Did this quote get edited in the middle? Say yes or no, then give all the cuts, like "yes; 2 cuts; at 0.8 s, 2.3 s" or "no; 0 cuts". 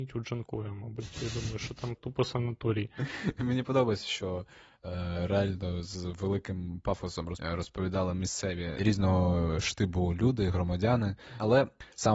yes; 1 cut; at 2.0 s